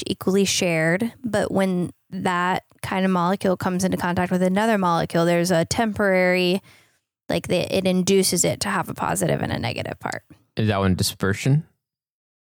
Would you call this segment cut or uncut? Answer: uncut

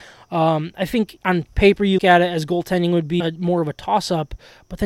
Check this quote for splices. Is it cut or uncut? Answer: cut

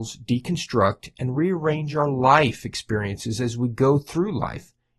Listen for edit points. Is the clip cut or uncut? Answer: uncut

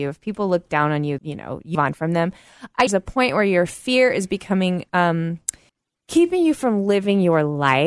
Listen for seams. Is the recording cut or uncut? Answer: cut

